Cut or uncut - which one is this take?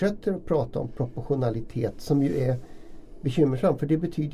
uncut